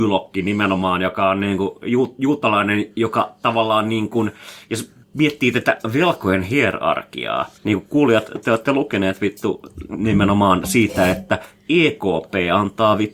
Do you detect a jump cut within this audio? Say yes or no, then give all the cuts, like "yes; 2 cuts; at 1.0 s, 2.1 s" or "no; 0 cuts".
yes; 2 cuts; at 5.0 s, 7.6 s